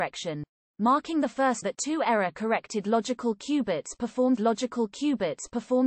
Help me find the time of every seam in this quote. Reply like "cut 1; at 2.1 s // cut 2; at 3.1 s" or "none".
cut 1; at 1.6 s // cut 2; at 4.4 s